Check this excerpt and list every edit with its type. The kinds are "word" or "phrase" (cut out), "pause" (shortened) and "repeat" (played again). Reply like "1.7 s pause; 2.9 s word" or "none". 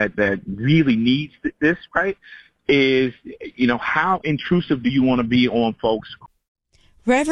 none